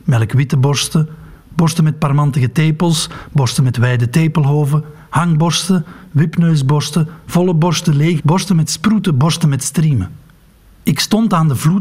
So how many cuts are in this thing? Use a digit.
1